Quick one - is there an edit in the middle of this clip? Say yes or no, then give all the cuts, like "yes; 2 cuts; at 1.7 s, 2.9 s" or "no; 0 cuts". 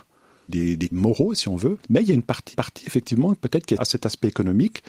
yes; 4 cuts; at 0.9 s, 1.8 s, 2.5 s, 3.8 s